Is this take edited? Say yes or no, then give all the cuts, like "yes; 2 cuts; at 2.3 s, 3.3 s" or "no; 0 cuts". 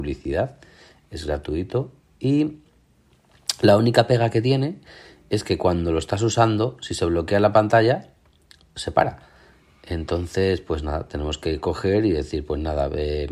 no; 0 cuts